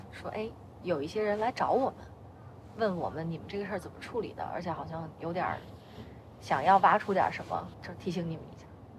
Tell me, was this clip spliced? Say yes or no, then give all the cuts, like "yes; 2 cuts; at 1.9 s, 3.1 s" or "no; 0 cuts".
yes; 1 cut; at 7.7 s